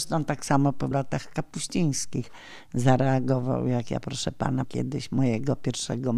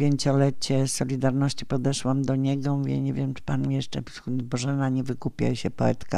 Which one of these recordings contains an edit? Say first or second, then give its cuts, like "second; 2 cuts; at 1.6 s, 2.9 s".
first; 2 cuts; at 0.9 s, 4.6 s